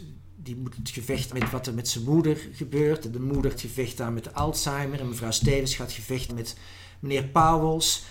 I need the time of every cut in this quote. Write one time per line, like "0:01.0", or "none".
0:01.3
0:03.5
0:06.3